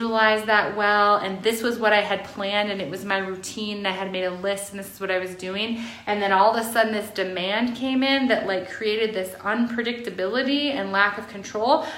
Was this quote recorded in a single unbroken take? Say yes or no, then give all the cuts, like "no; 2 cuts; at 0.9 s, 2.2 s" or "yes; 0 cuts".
yes; 0 cuts